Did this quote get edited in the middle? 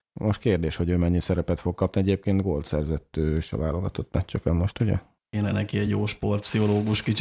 no; 0 cuts

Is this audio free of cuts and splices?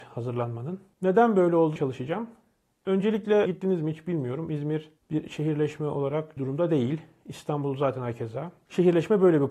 no; 3 cuts; at 1.8 s, 3.5 s, 6.4 s

